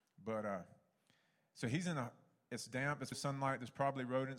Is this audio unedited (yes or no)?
no